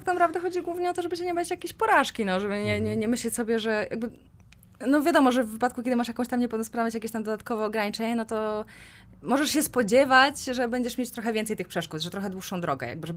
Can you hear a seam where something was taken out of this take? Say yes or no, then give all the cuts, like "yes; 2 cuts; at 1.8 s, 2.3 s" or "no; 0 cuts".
no; 0 cuts